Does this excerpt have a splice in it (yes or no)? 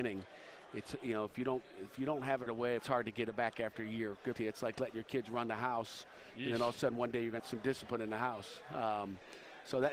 yes